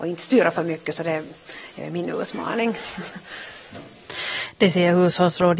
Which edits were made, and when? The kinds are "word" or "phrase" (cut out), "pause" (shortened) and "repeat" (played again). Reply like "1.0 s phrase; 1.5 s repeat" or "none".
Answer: none